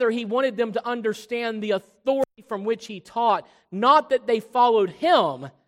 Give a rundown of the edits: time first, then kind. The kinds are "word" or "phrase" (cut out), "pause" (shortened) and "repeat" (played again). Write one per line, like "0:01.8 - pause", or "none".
none